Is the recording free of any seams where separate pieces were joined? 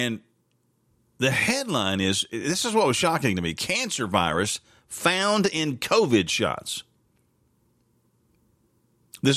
yes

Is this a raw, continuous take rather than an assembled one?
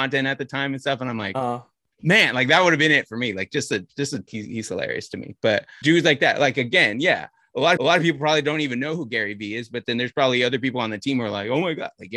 no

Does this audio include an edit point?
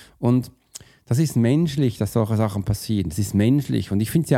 no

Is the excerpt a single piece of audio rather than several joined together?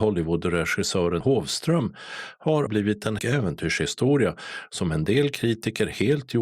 no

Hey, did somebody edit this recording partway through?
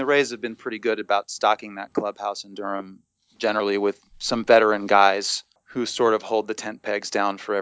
no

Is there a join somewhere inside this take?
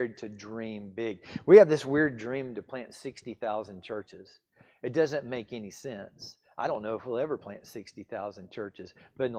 no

